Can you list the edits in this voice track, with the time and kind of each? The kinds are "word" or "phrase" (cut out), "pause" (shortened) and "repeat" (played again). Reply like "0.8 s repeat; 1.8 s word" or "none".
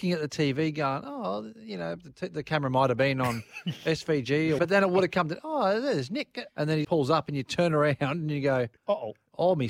4.6 s word; 6.5 s pause; 6.8 s word; 8.8 s pause